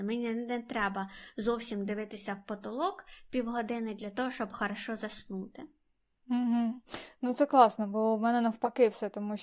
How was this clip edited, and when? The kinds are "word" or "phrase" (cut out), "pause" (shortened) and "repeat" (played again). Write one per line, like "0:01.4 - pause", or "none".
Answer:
none